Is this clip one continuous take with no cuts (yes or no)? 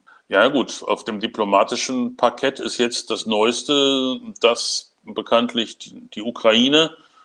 yes